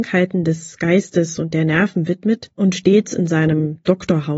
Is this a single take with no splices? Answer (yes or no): yes